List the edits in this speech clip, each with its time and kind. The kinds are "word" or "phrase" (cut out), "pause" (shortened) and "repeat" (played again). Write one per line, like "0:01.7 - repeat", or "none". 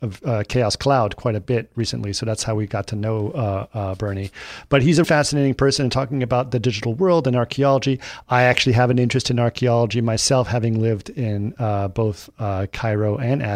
0:05.0 - word